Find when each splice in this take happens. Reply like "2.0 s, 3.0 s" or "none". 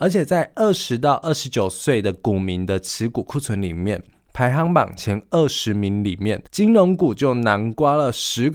6.5 s